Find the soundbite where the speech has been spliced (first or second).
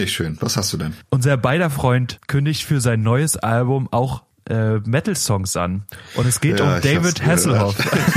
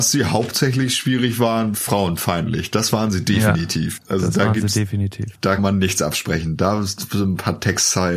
second